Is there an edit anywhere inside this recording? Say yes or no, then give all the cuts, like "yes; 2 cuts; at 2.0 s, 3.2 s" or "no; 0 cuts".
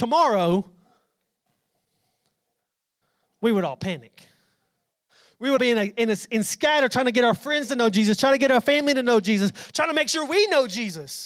yes; 1 cut; at 5.6 s